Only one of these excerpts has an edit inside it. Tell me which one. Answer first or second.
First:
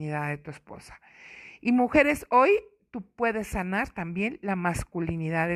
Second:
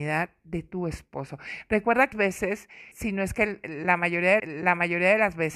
second